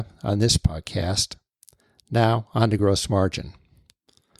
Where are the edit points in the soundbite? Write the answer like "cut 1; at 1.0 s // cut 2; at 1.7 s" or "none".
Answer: none